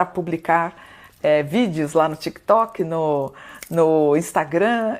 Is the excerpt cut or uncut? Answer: uncut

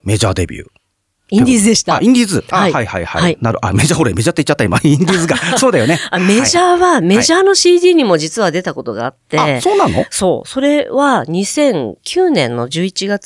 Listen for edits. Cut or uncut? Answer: uncut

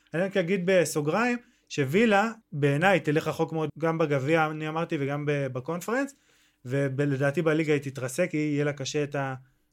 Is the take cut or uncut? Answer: cut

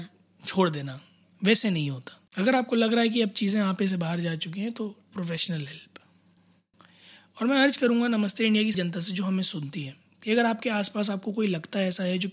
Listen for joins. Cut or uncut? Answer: cut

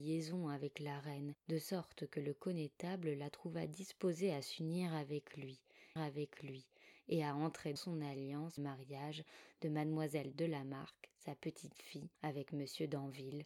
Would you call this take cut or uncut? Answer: cut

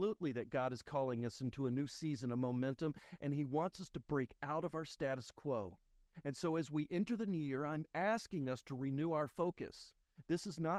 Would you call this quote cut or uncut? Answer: uncut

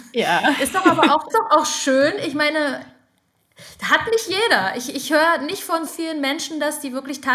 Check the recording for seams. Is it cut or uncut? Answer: cut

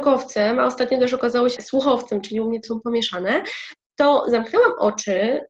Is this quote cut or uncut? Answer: cut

